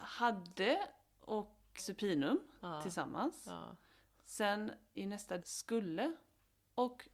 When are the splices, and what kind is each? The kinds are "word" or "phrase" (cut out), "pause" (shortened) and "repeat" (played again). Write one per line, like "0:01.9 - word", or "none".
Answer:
0:01.8 - word
0:04.9 - word
0:05.4 - word